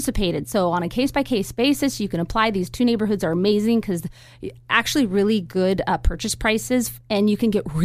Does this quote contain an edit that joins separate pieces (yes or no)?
no